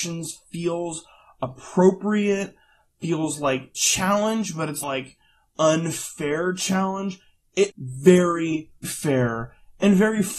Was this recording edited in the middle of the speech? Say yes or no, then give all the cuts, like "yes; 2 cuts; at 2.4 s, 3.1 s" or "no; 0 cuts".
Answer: yes; 4 cuts; at 3.7 s, 4.8 s, 7.7 s, 8.8 s